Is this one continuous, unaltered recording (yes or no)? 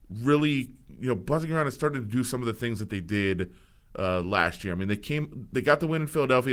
yes